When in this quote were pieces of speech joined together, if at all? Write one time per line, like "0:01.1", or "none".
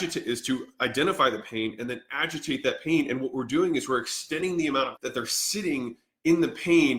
0:05.0